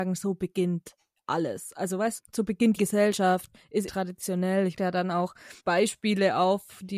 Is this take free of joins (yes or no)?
no